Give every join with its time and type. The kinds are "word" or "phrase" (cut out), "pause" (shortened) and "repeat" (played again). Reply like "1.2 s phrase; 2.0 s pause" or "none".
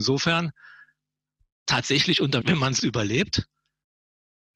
2.4 s word; 2.8 s word